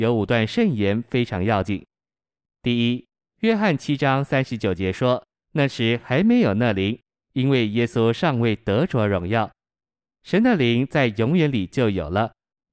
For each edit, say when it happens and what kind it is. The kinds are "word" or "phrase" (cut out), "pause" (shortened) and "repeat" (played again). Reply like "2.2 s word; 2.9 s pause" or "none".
5.3 s pause